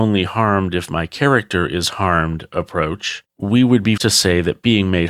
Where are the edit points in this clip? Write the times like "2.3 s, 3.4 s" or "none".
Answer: 3.3 s, 4.0 s